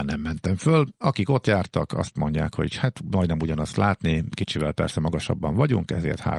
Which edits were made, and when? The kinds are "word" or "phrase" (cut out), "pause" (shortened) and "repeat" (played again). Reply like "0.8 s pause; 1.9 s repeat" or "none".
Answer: none